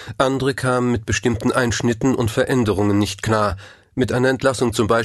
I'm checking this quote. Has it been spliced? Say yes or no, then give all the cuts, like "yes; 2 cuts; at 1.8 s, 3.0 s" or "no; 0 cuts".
no; 0 cuts